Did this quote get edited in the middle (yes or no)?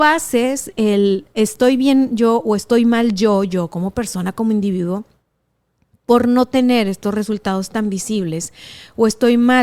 no